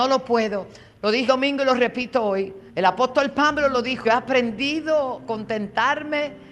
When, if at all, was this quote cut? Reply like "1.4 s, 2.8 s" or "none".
1.3 s, 2.7 s, 4.0 s, 5.3 s